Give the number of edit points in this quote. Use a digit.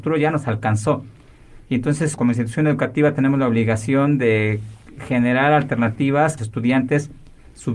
2